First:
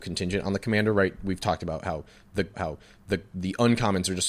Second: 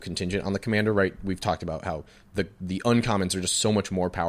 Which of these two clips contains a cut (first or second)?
first